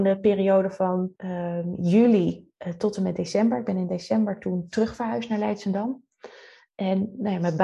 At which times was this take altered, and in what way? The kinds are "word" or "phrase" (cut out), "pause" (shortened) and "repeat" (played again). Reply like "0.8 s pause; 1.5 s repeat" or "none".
1.2 s pause